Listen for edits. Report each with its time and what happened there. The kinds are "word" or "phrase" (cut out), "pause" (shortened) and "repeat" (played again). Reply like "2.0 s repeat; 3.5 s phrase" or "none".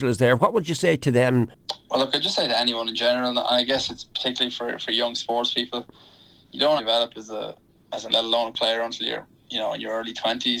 6.8 s word; 8.1 s word